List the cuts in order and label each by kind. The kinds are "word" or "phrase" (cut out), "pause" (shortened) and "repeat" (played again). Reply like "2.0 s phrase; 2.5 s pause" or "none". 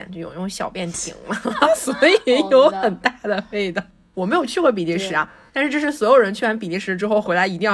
none